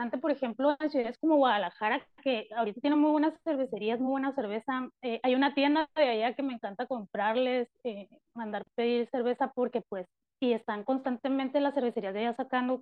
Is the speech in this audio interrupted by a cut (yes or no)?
no